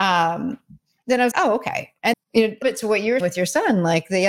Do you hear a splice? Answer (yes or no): yes